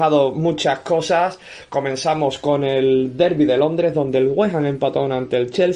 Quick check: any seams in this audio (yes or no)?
no